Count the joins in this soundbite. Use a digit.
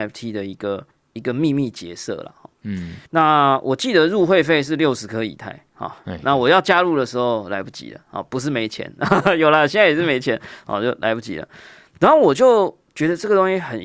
2